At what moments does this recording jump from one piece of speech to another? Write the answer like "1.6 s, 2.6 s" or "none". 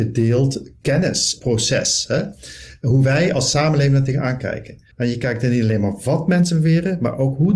4.9 s

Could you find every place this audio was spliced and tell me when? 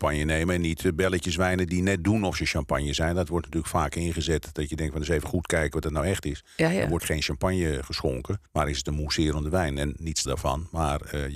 7.0 s, 8.5 s, 10.3 s

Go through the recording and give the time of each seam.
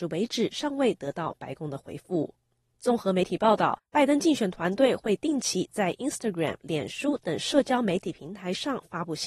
none

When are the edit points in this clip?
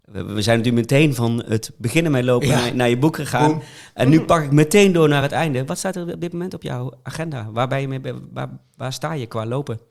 none

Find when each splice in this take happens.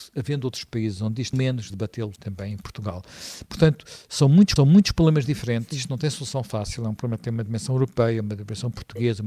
1.3 s, 1.7 s, 2.2 s, 4.6 s

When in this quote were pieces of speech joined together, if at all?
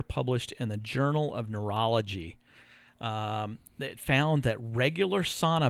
none

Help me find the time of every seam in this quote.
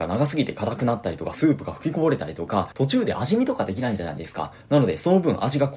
none

